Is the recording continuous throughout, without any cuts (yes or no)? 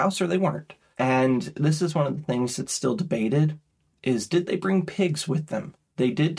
yes